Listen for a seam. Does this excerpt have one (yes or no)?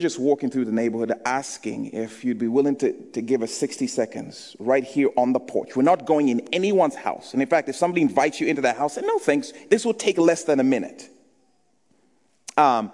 no